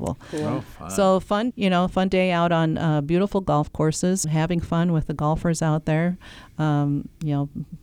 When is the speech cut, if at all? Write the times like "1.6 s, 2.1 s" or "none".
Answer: 1.5 s, 4.2 s